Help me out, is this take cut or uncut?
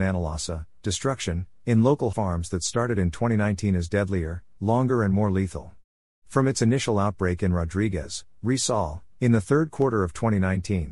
cut